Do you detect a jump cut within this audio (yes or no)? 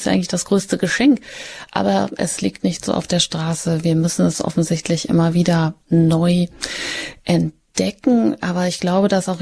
no